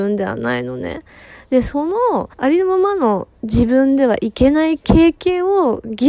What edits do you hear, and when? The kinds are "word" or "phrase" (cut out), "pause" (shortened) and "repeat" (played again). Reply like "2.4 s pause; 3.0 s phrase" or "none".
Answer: 2.3 s pause